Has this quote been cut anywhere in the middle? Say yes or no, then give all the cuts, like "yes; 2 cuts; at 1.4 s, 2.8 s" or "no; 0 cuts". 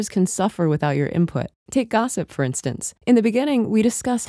no; 0 cuts